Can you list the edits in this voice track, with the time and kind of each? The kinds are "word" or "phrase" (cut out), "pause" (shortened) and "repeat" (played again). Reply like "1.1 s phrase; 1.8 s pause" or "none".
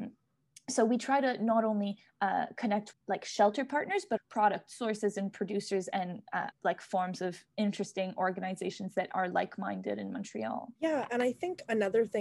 2.9 s word; 4.2 s word; 6.5 s word; 10.8 s pause

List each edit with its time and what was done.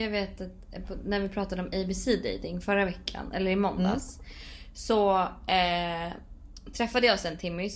none

